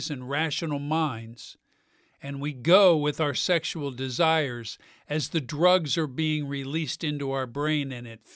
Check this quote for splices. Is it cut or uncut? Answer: uncut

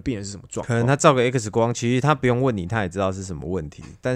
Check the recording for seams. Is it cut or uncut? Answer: uncut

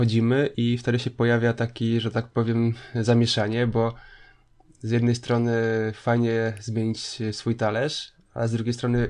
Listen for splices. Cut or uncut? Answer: uncut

